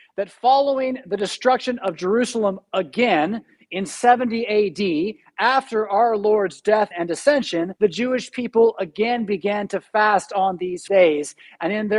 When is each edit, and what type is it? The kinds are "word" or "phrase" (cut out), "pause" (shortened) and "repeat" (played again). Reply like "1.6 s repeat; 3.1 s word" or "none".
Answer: 6.9 s word; 7.8 s pause; 10.9 s word